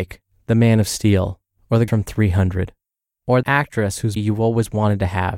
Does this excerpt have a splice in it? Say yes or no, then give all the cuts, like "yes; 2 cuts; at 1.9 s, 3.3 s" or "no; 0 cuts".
yes; 3 cuts; at 1.9 s, 3.4 s, 4.2 s